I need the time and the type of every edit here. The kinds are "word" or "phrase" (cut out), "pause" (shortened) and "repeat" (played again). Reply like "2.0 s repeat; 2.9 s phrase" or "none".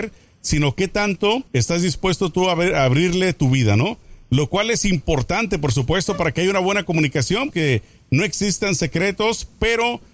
1.5 s pause; 7.5 s word